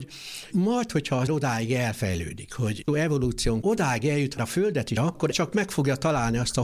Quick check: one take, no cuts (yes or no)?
no